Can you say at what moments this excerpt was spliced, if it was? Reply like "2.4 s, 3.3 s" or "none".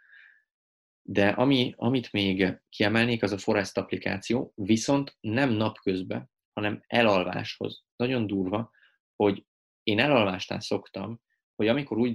2.7 s